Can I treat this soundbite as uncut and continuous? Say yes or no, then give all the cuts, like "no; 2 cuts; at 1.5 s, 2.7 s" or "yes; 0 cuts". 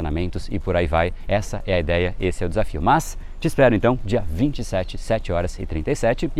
yes; 0 cuts